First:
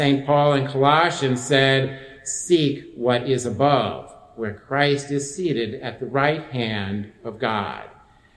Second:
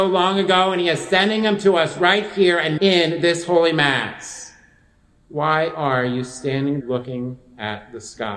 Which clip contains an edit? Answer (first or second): second